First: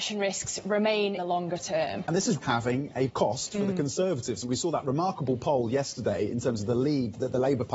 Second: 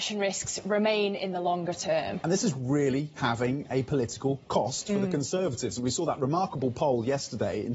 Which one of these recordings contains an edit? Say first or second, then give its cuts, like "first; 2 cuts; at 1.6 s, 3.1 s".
first; 3 cuts; at 1.2 s, 2.4 s, 3.1 s